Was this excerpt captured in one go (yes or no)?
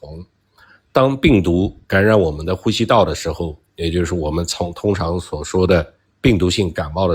no